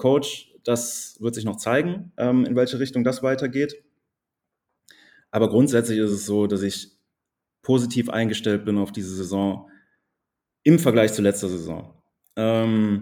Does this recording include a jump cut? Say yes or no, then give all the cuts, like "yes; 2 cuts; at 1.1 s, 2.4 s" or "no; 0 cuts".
no; 0 cuts